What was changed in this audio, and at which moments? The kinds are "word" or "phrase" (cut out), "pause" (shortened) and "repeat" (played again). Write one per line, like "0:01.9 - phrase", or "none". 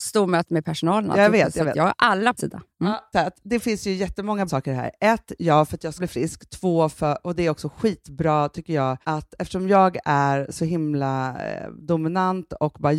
0:02.4 - word
0:03.1 - phrase
0:04.5 - word
0:06.0 - word
0:09.0 - pause